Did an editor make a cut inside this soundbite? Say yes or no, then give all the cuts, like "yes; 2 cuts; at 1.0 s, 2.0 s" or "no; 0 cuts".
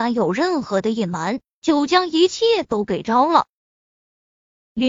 no; 0 cuts